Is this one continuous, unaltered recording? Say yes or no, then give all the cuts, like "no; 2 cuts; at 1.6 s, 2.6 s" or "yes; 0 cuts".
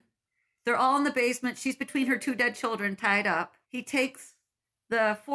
no; 1 cut; at 3.6 s